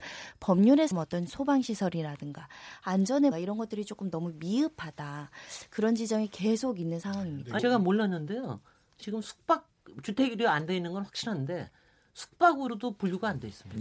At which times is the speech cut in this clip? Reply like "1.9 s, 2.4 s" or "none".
0.9 s, 3.3 s, 7.6 s, 9.0 s